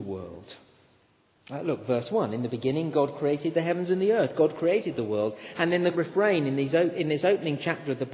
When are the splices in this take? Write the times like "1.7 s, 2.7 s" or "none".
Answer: 5.9 s